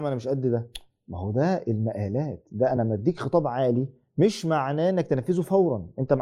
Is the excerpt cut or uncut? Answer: uncut